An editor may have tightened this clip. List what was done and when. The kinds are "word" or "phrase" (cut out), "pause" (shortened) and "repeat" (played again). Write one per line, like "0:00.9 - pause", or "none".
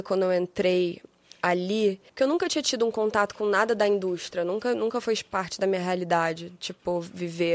0:02.1 - pause